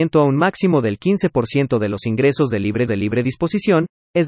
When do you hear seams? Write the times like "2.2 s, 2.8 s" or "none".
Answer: 2.9 s